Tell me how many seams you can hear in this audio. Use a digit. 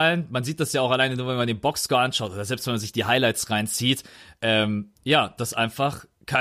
1